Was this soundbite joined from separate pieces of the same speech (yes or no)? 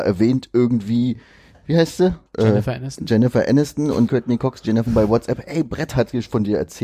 yes